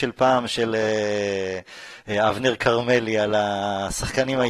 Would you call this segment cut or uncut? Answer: uncut